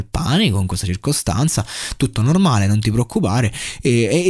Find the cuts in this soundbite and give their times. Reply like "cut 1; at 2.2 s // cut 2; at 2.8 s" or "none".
none